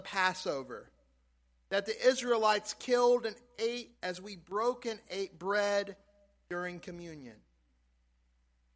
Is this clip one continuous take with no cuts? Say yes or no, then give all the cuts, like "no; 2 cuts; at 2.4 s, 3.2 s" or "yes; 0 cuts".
yes; 0 cuts